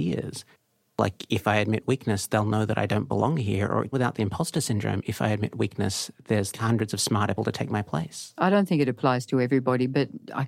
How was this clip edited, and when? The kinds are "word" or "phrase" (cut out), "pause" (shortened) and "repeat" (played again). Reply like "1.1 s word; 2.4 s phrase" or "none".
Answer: 3.9 s word; 6.5 s word; 7.4 s word